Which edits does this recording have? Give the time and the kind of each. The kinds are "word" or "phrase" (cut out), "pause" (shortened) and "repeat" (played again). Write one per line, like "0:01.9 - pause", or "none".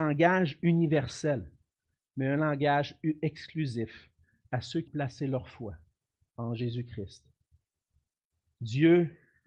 0:04.9 - word